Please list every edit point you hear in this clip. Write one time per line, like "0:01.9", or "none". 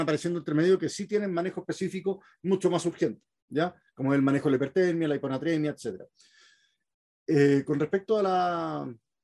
none